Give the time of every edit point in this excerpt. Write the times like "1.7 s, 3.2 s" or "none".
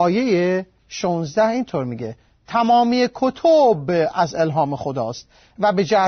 none

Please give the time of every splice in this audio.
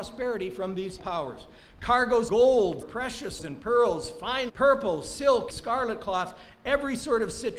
1.0 s, 2.3 s, 2.8 s, 3.4 s, 4.5 s, 5.5 s

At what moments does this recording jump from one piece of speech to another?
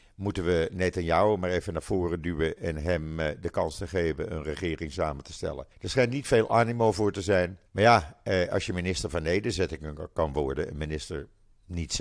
5.7 s, 7.7 s

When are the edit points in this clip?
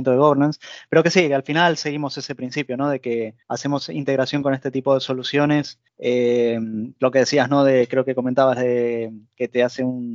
3.4 s, 5.9 s

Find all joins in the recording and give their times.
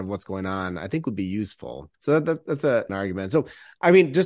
1.9 s, 2.9 s

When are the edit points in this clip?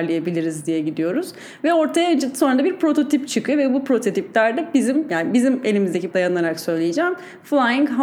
6.1 s

